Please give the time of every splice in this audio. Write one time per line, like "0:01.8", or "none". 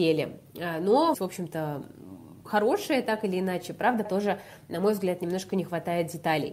0:01.1
0:02.4
0:04.0